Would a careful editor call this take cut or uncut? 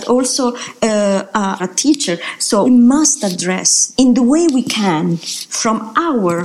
cut